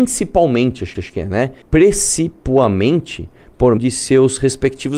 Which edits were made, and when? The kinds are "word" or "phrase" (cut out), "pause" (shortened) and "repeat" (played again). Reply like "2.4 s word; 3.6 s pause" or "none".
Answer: 0.9 s repeat; 1.6 s pause; 3.8 s word